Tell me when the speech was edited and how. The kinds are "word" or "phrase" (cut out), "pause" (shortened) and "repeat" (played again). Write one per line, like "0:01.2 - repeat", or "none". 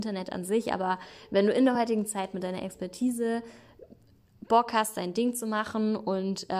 none